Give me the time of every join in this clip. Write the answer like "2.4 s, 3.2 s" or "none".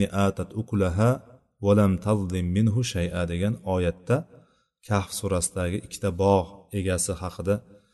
none